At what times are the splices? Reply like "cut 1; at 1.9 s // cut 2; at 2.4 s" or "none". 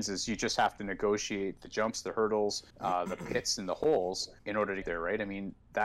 cut 1; at 2.7 s // cut 2; at 4.4 s // cut 3; at 4.8 s